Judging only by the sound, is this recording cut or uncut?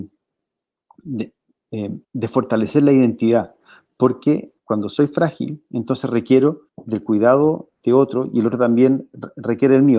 cut